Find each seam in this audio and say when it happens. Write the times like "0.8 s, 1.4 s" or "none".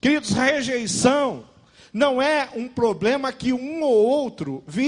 none